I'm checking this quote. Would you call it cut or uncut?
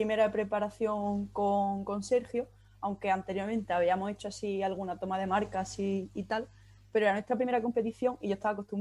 uncut